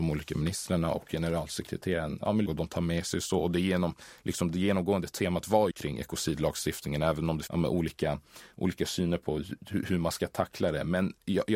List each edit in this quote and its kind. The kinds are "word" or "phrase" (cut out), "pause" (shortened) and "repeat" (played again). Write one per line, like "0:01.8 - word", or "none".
0:02.5 - phrase
0:05.7 - word
0:07.5 - word